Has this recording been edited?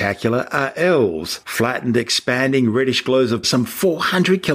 yes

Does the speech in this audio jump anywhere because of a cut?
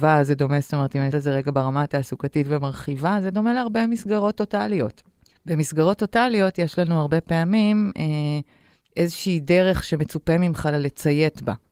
yes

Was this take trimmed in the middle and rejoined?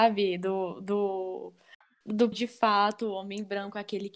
yes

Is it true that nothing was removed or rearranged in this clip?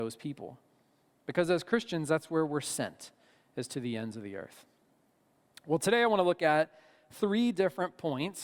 yes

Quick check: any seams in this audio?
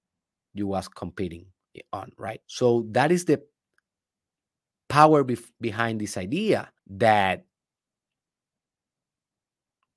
yes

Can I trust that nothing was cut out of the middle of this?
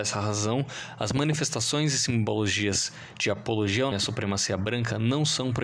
no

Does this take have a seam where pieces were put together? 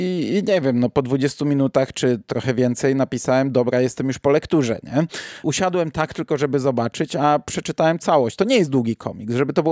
no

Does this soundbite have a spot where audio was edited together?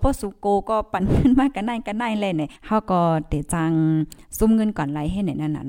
yes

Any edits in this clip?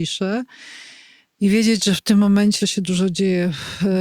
yes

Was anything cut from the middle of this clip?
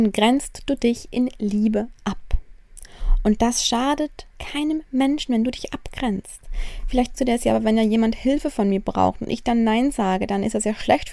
yes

